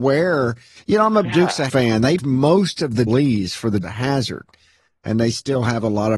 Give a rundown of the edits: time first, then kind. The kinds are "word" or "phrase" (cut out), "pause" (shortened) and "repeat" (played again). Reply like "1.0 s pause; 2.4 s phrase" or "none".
1.2 s word; 1.7 s word; 2.2 s word; 3.1 s word; 3.8 s word